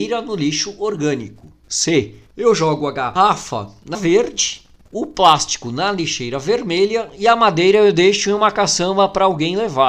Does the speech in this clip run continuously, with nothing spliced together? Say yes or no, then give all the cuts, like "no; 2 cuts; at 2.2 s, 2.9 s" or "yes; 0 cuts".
no; 1 cut; at 3.9 s